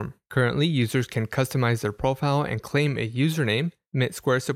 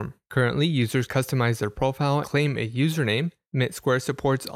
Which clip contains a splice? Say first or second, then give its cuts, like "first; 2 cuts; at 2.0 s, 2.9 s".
second; 2 cuts; at 1.1 s, 2.2 s